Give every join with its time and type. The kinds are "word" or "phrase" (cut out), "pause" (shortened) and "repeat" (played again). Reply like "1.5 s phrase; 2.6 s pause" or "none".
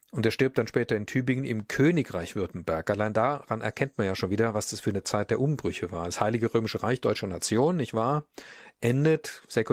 none